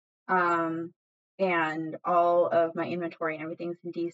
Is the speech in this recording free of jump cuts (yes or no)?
yes